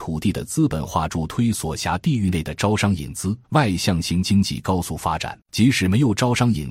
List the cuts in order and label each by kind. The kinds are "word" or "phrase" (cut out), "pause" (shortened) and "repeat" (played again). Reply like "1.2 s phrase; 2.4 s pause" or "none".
3.4 s pause; 5.4 s pause